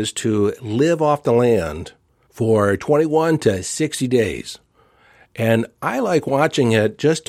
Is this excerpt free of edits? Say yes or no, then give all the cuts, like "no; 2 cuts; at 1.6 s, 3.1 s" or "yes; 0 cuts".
yes; 0 cuts